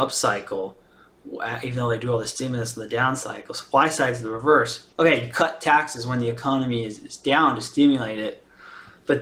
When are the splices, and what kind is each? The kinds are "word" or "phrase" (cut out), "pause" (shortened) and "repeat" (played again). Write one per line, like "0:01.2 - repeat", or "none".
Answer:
0:04.9 - pause